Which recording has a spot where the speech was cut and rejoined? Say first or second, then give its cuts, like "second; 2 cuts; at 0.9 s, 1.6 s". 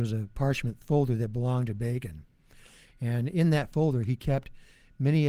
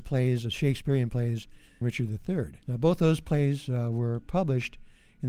second; 2 cuts; at 1.8 s, 2.6 s